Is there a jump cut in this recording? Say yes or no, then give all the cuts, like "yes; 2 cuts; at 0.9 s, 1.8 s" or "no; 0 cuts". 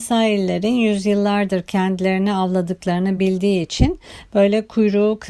no; 0 cuts